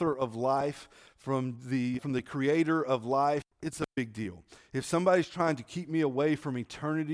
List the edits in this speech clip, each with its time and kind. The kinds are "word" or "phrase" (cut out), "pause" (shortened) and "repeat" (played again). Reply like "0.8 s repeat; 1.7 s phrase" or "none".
2.0 s word; 3.5 s pause

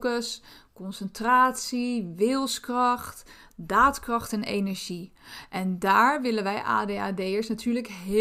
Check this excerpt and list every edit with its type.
none

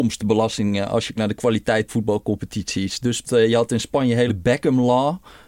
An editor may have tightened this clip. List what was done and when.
1.2 s word; 1.9 s word; 3.2 s word; 4.3 s word

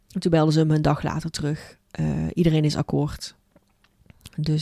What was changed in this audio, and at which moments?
1.8 s pause

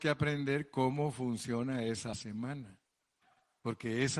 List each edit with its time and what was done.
2.1 s word

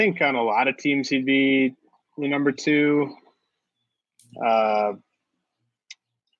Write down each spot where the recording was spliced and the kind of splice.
none

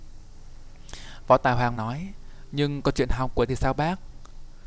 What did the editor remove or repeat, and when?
1.7 s word; 3.5 s word

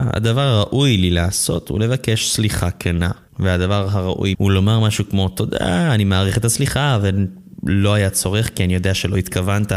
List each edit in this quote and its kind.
3.3 s pause; 4.3 s word

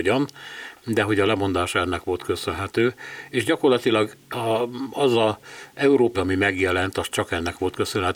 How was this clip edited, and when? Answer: 6.1 s word

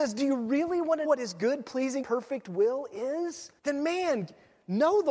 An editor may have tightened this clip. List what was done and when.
1.0 s word; 2.0 s word; 3.6 s pause

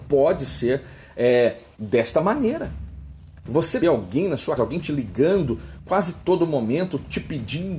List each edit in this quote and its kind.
3.8 s phrase; 4.6 s word

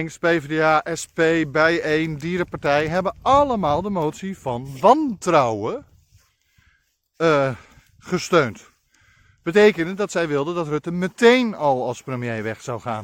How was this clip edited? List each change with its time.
none

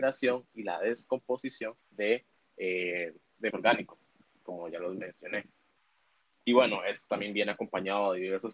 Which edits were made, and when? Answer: 1.8 s pause; 3.5 s word

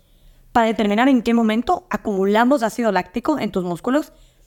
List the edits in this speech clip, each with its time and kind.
none

